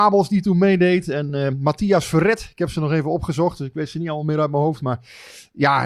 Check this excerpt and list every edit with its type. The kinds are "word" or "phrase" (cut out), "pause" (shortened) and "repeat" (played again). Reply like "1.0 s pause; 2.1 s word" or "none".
none